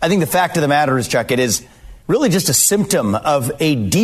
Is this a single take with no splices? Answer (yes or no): no